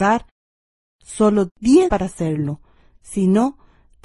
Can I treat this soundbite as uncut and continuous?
no; 2 cuts; at 1.5 s, 1.9 s

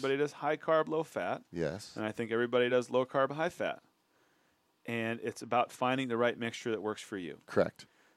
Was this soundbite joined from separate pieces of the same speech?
no; 0 cuts

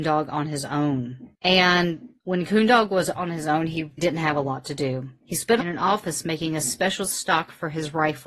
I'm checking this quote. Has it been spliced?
yes; 2 cuts; at 4.0 s, 5.6 s

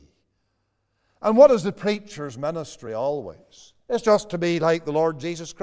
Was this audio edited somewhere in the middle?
no; 0 cuts

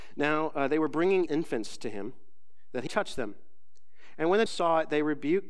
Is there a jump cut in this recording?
yes; 3 cuts; at 1.3 s, 2.9 s, 4.5 s

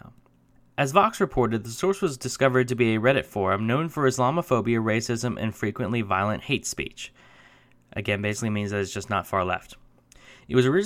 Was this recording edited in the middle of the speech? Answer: no; 0 cuts

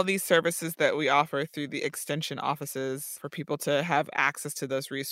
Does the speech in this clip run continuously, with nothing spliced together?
yes; 0 cuts

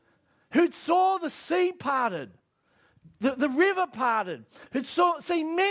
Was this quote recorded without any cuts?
yes; 0 cuts

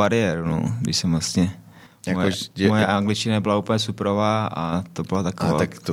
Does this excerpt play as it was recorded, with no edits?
yes; 0 cuts

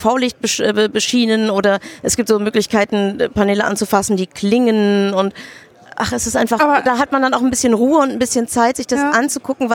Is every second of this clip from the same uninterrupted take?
yes; 0 cuts

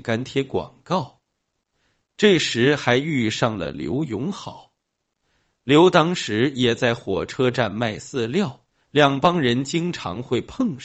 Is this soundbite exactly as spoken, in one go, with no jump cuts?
yes; 0 cuts

